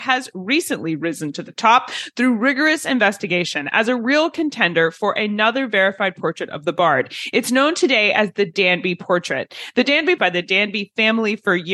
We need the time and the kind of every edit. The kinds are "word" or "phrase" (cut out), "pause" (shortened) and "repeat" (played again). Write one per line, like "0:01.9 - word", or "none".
0:10.2 - phrase